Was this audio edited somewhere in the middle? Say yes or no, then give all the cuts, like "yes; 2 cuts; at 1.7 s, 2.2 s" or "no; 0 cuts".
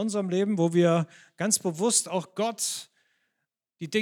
no; 0 cuts